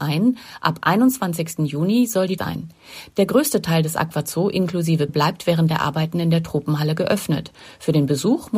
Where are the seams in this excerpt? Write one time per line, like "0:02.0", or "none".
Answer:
0:02.4
0:05.1

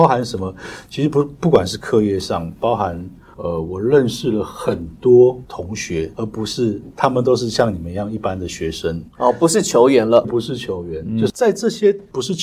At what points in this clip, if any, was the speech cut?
0:10.2

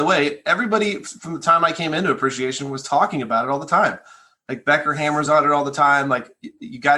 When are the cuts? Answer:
none

